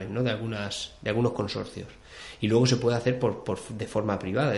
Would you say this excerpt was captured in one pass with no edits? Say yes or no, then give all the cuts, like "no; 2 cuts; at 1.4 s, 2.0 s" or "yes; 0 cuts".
yes; 0 cuts